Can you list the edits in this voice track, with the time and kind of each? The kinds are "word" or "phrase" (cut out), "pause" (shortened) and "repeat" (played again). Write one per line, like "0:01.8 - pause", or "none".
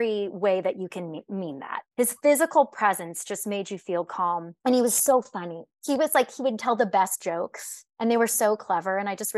0:04.6 - pause
0:07.2 - word